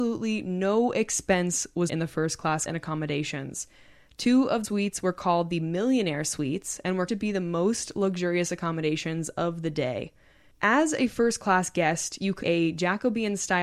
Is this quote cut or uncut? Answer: cut